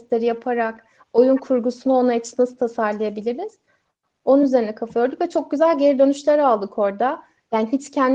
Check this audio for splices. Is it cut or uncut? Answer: uncut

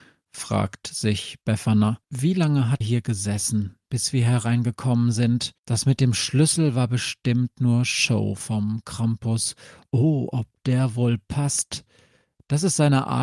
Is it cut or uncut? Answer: cut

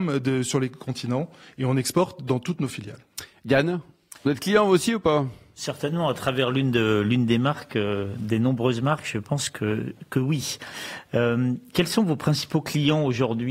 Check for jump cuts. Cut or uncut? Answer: uncut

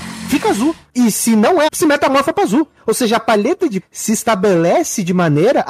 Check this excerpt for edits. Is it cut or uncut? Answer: cut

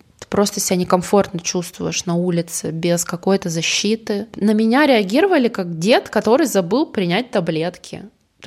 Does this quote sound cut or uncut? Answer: uncut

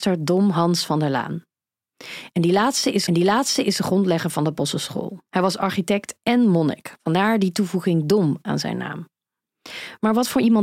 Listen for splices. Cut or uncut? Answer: cut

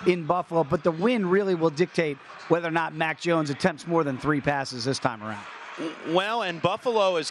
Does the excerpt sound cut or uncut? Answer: uncut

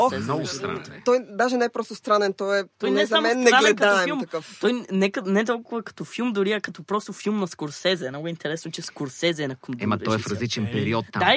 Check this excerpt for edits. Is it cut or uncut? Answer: cut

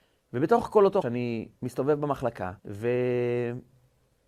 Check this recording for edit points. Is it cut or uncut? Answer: cut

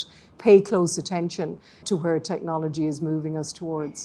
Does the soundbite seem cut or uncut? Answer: cut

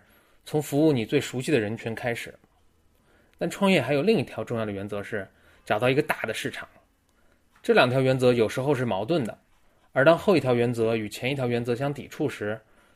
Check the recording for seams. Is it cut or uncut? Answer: uncut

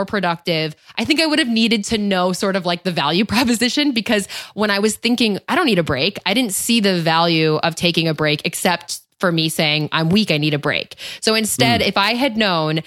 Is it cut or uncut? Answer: uncut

